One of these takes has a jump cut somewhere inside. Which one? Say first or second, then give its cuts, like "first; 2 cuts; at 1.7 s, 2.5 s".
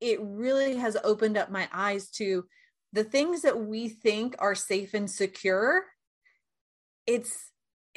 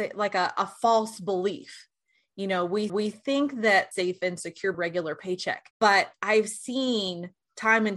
second; 4 cuts; at 2.9 s, 3.9 s, 4.7 s, 5.7 s